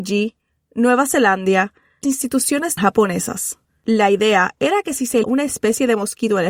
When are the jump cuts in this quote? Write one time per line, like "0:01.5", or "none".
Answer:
0:02.0
0:02.8
0:03.7
0:05.2